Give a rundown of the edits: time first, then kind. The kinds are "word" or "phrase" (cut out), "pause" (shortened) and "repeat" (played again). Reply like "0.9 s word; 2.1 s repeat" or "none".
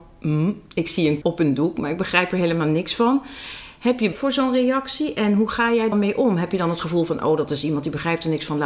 1.2 s word; 4.1 s word; 5.9 s phrase

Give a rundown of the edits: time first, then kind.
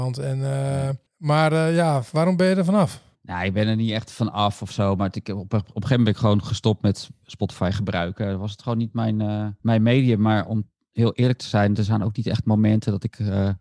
1.1 s pause; 3.1 s pause; 9.6 s pause

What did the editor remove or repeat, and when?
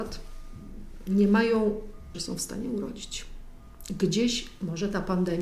2.1 s phrase

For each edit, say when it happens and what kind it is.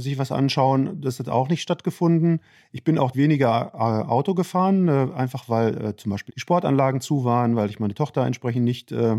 3.1 s word; 6.3 s word

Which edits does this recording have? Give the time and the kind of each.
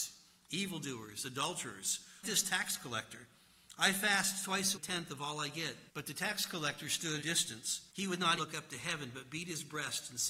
2.2 s phrase; 4.7 s phrase; 5.9 s pause; 7.2 s phrase; 7.9 s pause; 8.4 s word

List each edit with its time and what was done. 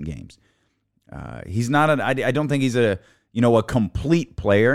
none

